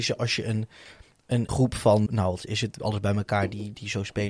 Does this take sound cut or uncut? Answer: cut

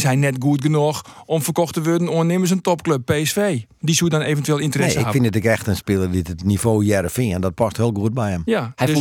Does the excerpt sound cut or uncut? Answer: uncut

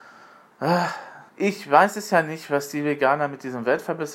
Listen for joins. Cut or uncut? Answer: cut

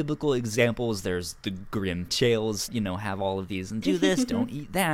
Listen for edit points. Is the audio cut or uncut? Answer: cut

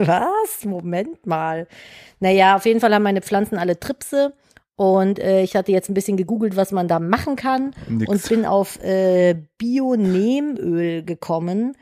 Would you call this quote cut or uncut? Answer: uncut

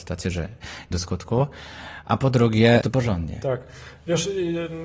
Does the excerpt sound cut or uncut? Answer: cut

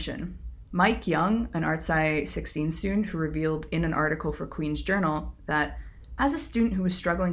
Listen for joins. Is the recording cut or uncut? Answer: uncut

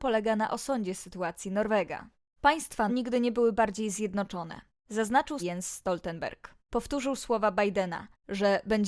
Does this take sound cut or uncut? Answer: cut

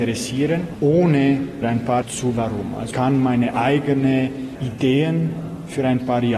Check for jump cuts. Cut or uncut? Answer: cut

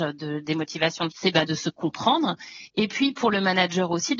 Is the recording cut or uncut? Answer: cut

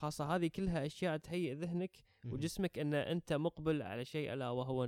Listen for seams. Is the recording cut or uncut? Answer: uncut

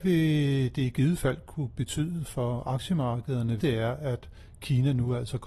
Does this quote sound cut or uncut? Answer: cut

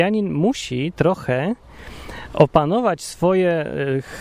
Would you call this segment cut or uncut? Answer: uncut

